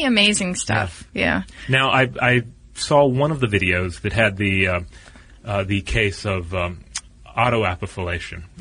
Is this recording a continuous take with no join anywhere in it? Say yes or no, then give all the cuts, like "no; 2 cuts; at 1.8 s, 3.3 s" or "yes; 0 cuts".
yes; 0 cuts